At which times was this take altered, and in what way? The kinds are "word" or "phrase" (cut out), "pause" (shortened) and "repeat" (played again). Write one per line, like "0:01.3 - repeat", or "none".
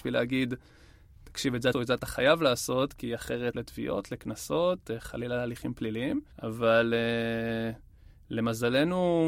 0:01.7 - phrase
0:03.5 - phrase
0:06.3 - pause